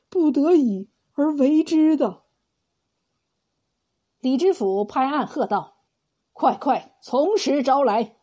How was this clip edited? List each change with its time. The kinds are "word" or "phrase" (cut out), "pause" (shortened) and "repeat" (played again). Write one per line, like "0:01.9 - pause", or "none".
0:05.9 - pause